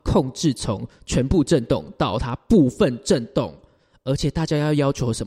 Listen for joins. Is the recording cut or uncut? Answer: uncut